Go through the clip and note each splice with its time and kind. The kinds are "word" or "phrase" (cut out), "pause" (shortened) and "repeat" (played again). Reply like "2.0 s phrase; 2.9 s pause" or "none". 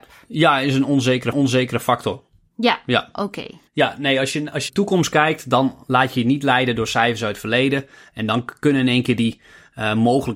1.3 s repeat; 3.7 s pause; 4.7 s phrase